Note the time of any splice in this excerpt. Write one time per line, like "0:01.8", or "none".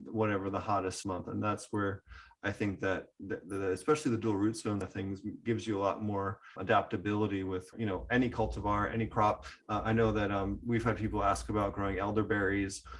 0:01.0
0:04.8
0:06.6
0:07.7

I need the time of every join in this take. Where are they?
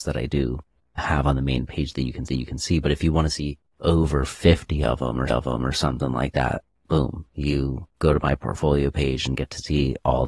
0:02.3
0:03.7
0:05.3
0:07.9

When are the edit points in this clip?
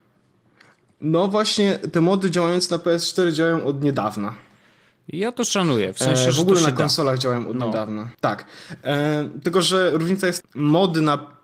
0:08.1
0:10.4

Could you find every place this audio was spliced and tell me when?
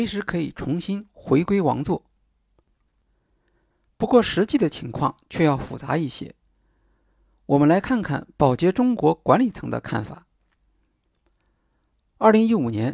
none

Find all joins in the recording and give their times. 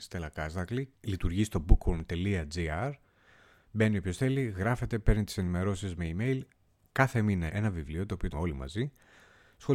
0:01.0
0:07.5
0:08.3

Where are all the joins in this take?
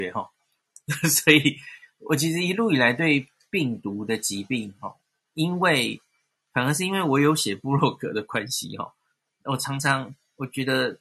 none

